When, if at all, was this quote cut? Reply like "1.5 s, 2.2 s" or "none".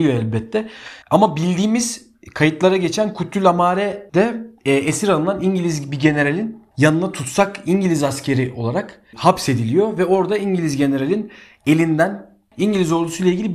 1.0 s